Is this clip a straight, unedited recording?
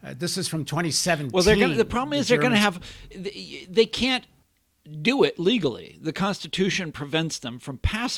no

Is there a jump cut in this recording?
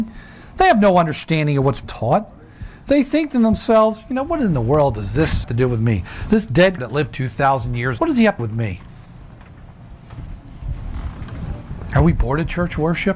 yes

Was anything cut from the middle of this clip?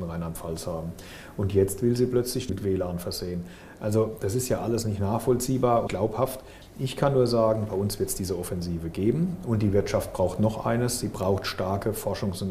yes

